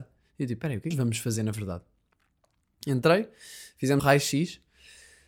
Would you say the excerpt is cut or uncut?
cut